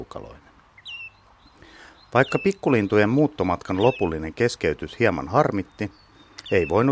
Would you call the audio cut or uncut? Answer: uncut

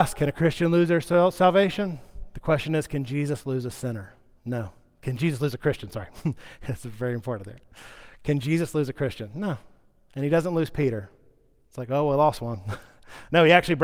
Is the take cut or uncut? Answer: uncut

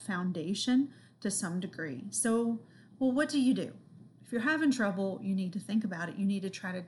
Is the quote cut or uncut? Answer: uncut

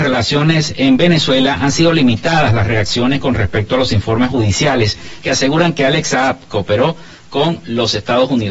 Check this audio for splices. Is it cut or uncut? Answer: uncut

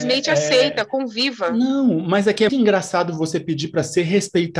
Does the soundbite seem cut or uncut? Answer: cut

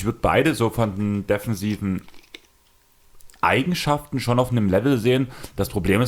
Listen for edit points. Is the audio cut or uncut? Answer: uncut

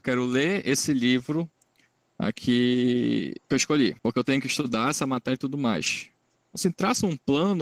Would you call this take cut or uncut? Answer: cut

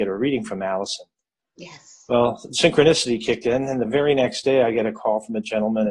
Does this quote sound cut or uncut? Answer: uncut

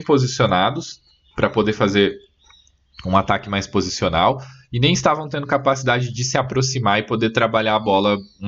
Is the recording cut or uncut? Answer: uncut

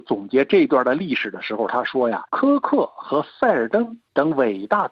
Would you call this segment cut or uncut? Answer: cut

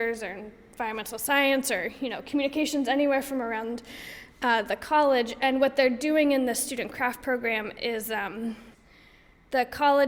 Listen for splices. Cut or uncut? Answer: uncut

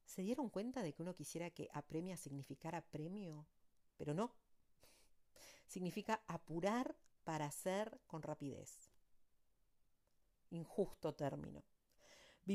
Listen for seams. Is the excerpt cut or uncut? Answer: uncut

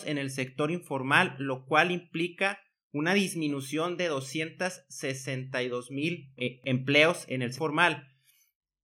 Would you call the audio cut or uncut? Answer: cut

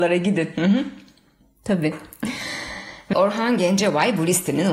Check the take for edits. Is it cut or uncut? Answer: cut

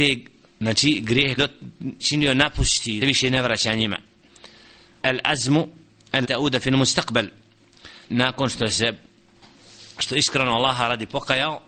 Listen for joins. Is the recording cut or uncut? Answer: cut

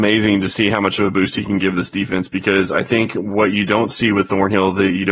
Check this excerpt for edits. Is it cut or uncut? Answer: uncut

